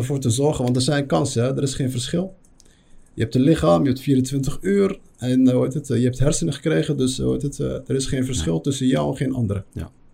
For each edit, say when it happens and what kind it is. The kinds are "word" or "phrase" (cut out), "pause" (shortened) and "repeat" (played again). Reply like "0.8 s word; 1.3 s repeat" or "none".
none